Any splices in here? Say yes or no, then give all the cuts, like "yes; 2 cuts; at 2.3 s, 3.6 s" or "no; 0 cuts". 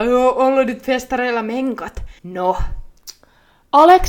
yes; 1 cut; at 2.2 s